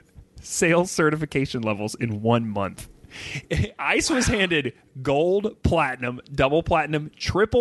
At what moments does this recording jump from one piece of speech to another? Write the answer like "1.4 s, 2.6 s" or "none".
none